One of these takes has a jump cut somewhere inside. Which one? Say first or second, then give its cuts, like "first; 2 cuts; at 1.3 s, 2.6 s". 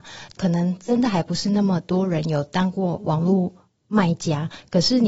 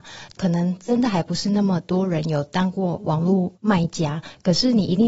second; 1 cut; at 3.5 s